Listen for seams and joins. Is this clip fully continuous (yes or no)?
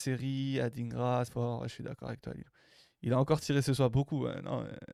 no